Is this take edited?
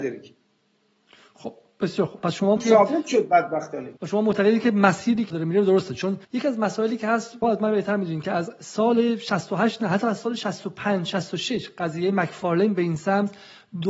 yes; 5 cuts; at 2.6 s, 4.0 s, 5.3 s, 6.2 s, 7.4 s

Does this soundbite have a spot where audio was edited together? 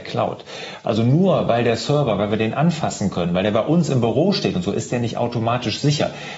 no; 0 cuts

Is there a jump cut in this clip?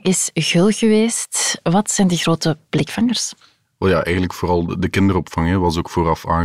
no; 0 cuts

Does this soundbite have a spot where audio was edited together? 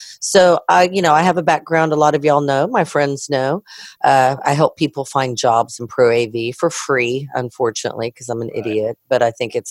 no; 0 cuts

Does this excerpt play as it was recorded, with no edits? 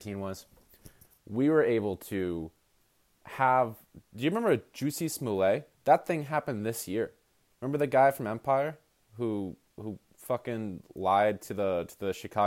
no; 1 cut; at 5.7 s

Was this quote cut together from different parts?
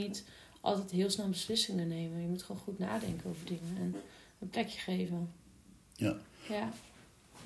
no; 0 cuts

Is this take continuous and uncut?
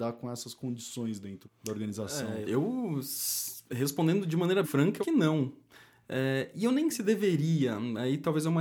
no; 5 cuts; at 1.4 s, 2.4 s, 4.6 s, 5.0 s, 6.9 s

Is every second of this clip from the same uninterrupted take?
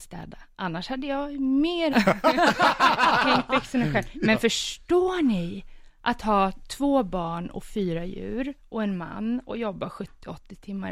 no; 1 cut; at 1.9 s

